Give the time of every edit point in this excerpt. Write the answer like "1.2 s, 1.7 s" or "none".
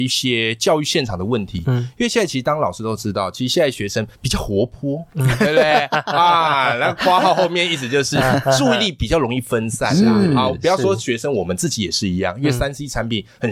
4.1 s